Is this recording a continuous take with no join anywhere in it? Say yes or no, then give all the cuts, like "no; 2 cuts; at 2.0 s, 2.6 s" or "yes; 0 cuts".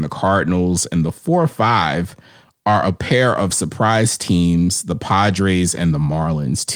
yes; 0 cuts